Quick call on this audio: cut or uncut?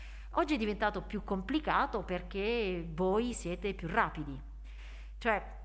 uncut